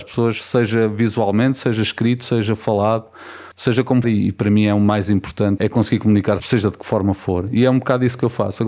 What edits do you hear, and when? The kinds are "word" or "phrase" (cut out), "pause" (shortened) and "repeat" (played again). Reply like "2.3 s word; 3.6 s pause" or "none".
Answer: 3.5 s pause; 4.0 s phrase; 5.6 s word; 6.4 s word